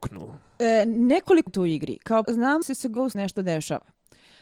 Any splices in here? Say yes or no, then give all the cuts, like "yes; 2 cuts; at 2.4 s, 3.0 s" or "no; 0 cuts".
yes; 4 cuts; at 1.5 s, 2.2 s, 2.6 s, 3.1 s